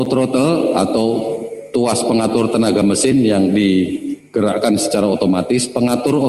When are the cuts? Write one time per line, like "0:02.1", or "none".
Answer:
none